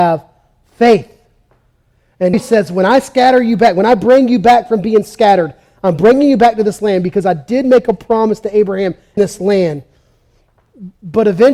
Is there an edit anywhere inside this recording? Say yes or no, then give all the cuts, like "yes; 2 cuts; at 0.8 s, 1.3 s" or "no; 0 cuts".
yes; 2 cuts; at 2.3 s, 9.2 s